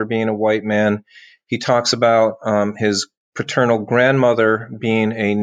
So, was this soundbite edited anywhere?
no; 0 cuts

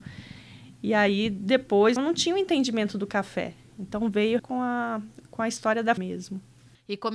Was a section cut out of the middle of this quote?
yes; 3 cuts; at 2.0 s, 4.4 s, 6.0 s

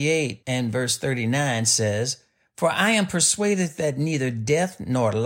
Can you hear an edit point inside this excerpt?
no; 0 cuts

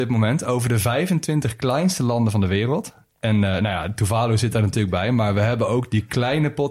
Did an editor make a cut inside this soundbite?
no; 0 cuts

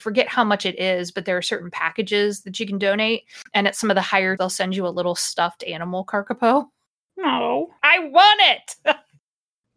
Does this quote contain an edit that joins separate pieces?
yes; 3 cuts; at 3.5 s, 4.4 s, 7.8 s

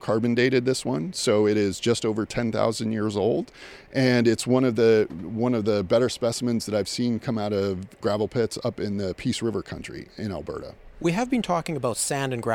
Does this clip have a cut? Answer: no; 0 cuts

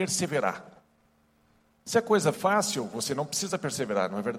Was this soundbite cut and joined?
yes; 1 cut; at 2.3 s

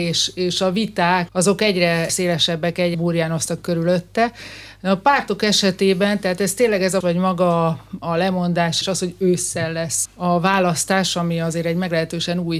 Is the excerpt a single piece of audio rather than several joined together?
no; 6 cuts; at 1.3 s, 2.1 s, 2.9 s, 7.0 s, 8.8 s, 10.1 s

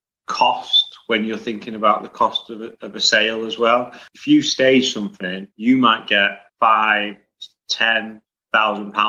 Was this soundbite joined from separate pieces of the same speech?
yes; 3 cuts; at 4.1 s, 5.5 s, 6.5 s

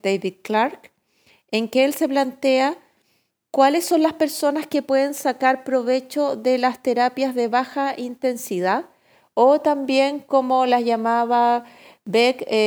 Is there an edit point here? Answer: no; 0 cuts

